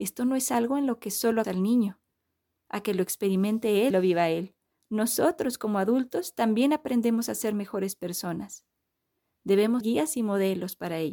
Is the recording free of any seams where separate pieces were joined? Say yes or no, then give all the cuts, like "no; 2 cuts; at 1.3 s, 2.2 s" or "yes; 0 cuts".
no; 3 cuts; at 1.4 s, 3.9 s, 9.8 s